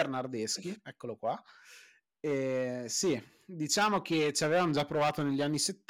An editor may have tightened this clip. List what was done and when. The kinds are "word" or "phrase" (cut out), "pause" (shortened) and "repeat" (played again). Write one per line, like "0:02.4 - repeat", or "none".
none